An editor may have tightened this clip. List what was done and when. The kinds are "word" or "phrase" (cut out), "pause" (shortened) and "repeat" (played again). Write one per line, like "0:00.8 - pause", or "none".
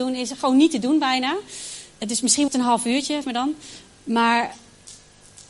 0:01.9 - pause
0:02.5 - word
0:03.2 - word